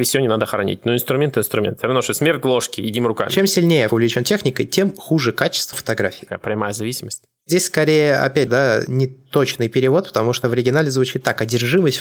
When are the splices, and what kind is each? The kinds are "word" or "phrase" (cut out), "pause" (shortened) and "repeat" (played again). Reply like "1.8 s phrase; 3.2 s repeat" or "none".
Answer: 3.9 s word; 5.7 s word; 8.5 s word